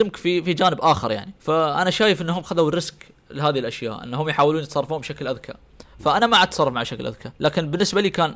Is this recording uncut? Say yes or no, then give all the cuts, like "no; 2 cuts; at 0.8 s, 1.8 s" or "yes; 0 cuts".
no; 2 cuts; at 1.4 s, 7.4 s